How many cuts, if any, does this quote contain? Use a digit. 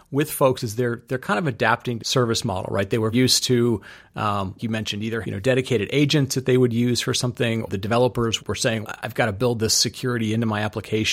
8